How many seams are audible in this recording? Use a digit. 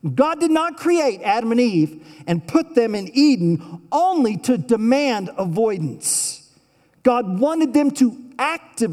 0